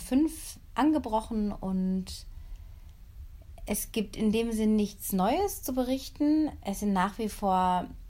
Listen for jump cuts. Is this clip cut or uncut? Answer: uncut